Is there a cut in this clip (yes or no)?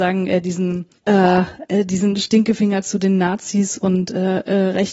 yes